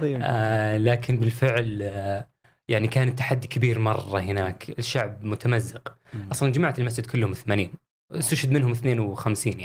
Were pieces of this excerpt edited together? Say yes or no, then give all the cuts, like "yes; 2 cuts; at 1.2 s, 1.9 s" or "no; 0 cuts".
no; 0 cuts